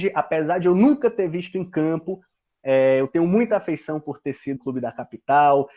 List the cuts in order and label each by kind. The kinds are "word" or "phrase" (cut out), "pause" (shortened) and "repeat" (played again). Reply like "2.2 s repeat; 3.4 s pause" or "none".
4.6 s word